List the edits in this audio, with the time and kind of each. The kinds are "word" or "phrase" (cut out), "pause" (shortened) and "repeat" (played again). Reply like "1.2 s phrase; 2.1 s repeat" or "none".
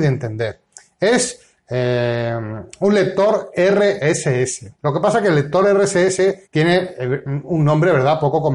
4.7 s pause; 6.4 s pause